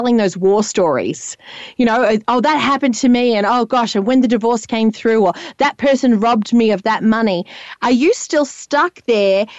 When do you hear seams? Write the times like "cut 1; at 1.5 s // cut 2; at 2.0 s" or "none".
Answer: none